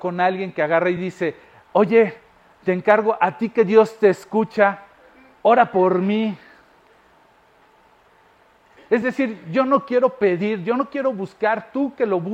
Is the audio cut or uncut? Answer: uncut